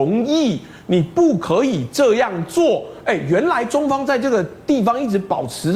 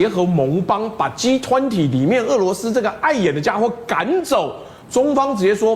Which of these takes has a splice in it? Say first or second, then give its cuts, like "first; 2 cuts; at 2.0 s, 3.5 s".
second; 1 cut; at 4.8 s